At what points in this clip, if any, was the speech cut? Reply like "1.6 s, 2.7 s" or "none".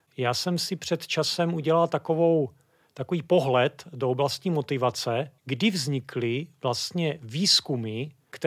5.4 s